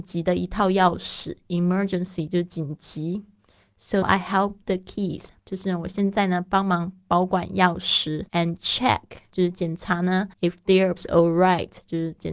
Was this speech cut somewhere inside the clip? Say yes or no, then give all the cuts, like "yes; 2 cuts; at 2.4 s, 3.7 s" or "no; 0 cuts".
yes; 6 cuts; at 4.0 s, 4.6 s, 5.4 s, 8.3 s, 10.3 s, 11.0 s